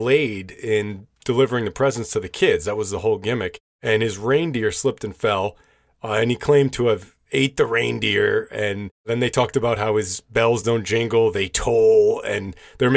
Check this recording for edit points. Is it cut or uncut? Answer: uncut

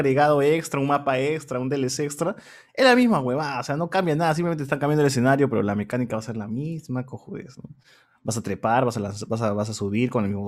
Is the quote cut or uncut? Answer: uncut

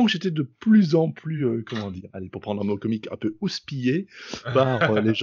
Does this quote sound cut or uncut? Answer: uncut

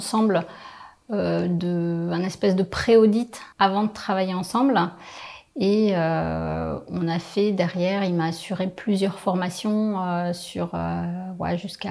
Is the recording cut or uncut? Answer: cut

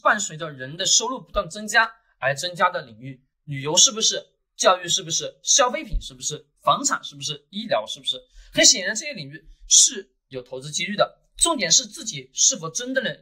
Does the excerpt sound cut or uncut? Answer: cut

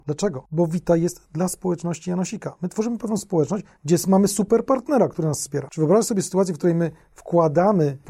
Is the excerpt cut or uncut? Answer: uncut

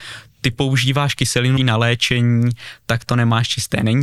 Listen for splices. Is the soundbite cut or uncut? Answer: cut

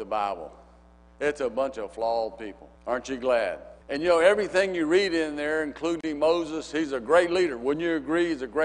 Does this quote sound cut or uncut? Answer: cut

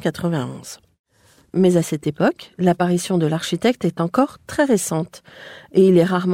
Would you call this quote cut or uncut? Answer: uncut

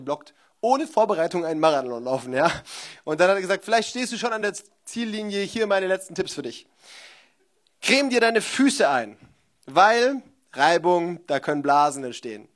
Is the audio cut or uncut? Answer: uncut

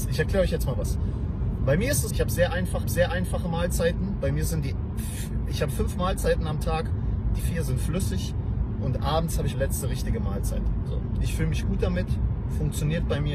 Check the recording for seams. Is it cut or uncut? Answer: cut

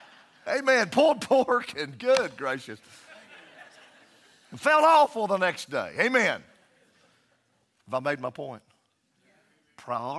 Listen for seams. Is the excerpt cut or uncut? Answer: uncut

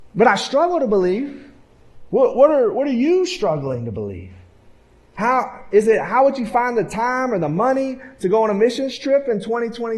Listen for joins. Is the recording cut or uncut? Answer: uncut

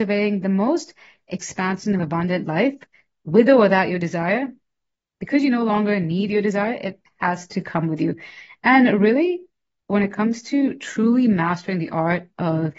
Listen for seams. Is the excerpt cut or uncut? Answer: uncut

